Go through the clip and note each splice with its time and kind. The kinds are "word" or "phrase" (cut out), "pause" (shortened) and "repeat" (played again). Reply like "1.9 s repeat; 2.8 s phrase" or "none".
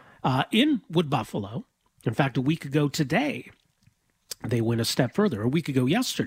none